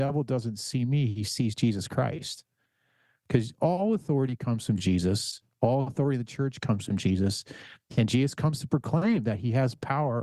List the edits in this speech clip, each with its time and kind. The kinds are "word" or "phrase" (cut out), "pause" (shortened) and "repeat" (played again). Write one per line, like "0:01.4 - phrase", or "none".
none